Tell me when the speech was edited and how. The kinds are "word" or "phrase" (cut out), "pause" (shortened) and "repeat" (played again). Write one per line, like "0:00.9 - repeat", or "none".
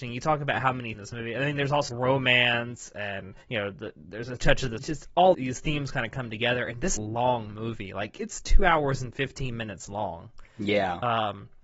0:00.9 - phrase
0:01.9 - word
0:03.4 - pause
0:04.8 - phrase
0:05.3 - word
0:07.0 - phrase